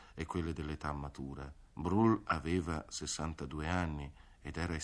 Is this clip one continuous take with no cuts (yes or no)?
no